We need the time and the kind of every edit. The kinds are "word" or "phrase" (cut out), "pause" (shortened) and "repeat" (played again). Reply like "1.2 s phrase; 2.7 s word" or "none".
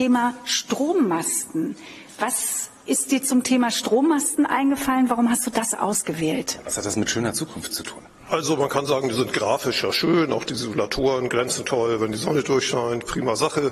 none